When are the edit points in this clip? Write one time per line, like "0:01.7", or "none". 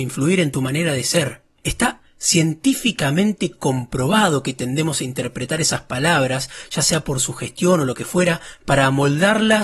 none